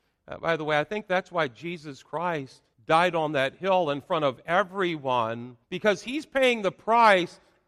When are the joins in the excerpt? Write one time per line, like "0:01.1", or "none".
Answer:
0:02.7
0:05.6